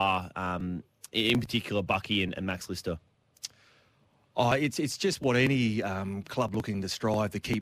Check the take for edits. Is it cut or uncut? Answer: uncut